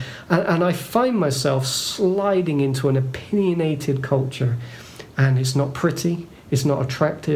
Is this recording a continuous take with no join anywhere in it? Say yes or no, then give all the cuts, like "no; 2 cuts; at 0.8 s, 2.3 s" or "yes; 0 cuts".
yes; 0 cuts